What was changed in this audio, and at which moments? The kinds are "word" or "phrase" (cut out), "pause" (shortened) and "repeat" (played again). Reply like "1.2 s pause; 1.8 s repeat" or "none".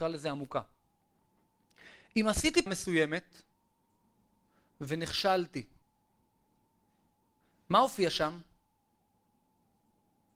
2.7 s word